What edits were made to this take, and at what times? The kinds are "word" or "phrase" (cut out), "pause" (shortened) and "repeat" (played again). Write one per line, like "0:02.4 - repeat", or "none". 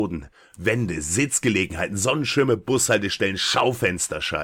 none